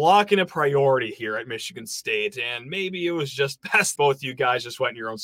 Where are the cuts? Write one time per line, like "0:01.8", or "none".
0:03.9